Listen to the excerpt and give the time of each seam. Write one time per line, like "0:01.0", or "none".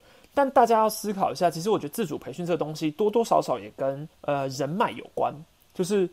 0:04.1